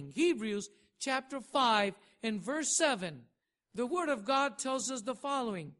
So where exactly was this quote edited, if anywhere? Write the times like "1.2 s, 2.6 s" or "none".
none